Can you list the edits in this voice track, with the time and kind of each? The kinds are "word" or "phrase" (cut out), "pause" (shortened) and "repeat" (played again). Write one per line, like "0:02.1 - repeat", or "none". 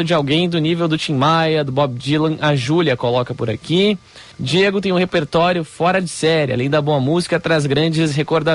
0:04.3 - pause